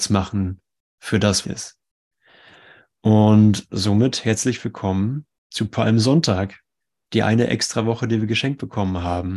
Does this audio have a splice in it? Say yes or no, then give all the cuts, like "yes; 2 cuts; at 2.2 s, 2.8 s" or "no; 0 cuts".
yes; 2 cuts; at 1.4 s, 6.8 s